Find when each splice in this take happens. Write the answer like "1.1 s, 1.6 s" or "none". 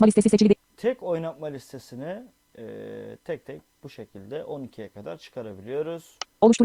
none